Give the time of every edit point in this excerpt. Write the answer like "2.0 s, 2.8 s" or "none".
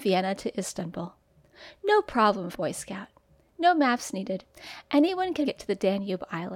2.5 s, 5.4 s